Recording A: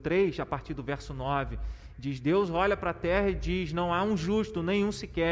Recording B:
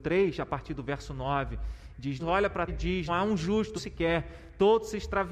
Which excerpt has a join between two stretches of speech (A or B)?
B